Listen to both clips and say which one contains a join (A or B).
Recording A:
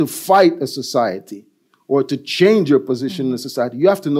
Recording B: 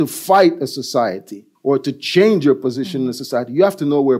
B